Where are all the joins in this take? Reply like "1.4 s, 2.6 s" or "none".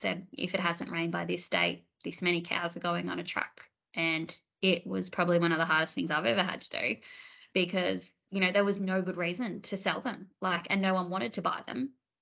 none